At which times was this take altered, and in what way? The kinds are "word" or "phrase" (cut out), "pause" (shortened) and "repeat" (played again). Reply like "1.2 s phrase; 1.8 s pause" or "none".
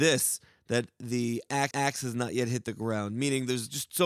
1.7 s repeat